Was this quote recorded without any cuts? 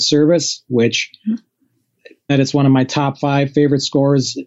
no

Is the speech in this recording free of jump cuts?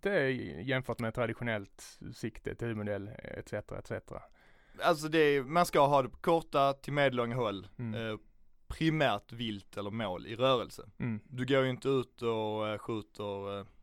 yes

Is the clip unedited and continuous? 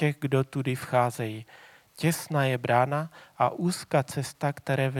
yes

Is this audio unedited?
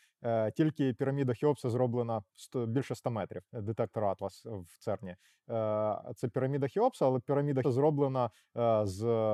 no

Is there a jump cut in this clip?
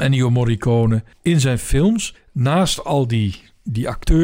yes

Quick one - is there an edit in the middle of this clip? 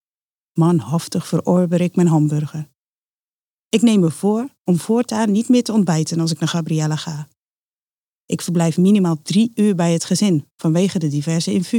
no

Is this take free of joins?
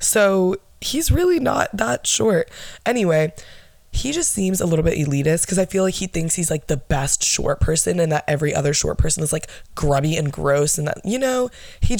yes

